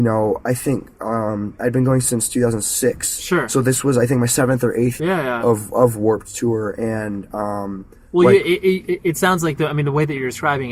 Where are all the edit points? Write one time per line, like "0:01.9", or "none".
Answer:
0:05.0